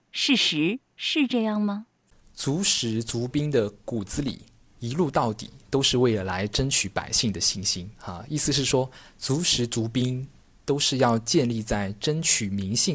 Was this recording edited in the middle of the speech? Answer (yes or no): yes